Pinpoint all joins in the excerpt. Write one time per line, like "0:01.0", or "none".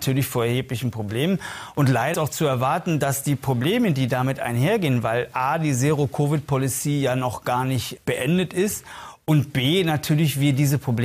0:02.1
0:08.0